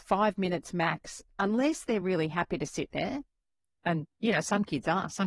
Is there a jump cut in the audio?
no; 0 cuts

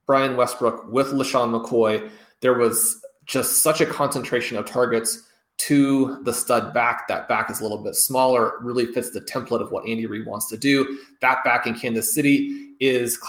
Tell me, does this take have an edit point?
no; 0 cuts

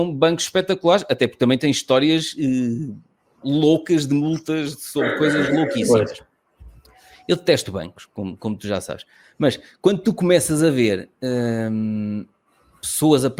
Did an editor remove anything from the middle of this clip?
no; 0 cuts

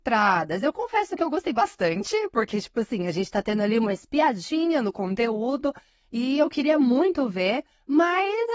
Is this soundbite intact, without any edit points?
yes; 0 cuts

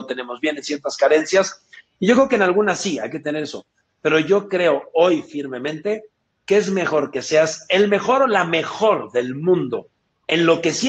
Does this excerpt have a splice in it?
no; 0 cuts

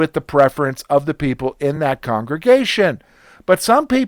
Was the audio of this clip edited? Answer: no; 0 cuts

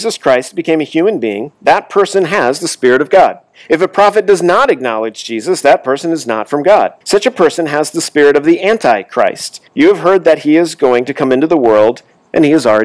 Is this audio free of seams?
no; 4 cuts; at 1.5 s, 3.5 s, 7.0 s, 9.7 s

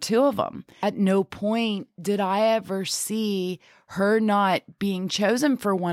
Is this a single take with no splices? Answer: yes; 0 cuts

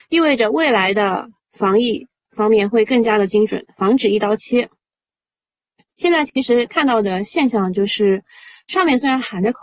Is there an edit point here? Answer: no; 0 cuts

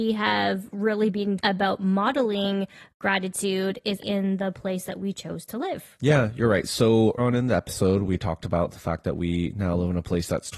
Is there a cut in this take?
yes; 3 cuts; at 1.4 s, 4.0 s, 7.2 s

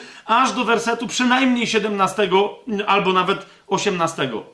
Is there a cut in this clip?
no; 0 cuts

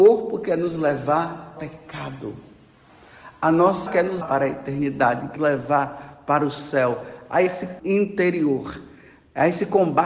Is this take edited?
yes; 6 cuts; at 1.6 s, 3.9 s, 4.2 s, 5.4 s, 7.5 s, 7.8 s

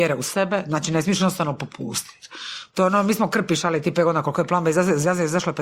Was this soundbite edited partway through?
no; 0 cuts

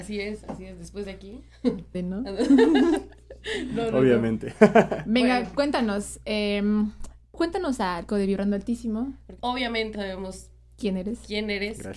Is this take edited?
yes; 4 cuts; at 1.9 s, 8.1 s, 9.4 s, 9.9 s

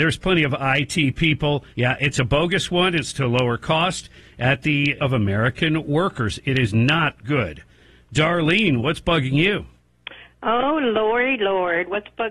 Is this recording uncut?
no; 2 cuts; at 1.7 s, 5.0 s

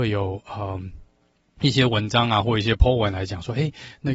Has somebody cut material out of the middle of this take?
no; 0 cuts

